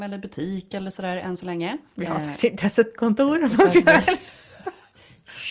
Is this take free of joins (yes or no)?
no